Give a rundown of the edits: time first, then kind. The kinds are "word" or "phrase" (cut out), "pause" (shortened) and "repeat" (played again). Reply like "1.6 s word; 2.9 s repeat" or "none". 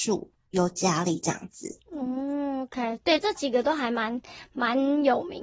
none